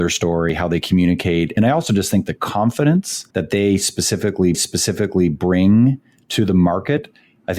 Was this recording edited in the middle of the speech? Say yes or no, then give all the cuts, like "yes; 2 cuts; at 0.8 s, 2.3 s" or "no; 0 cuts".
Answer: yes; 3 cuts; at 1.6 s, 3.3 s, 4.5 s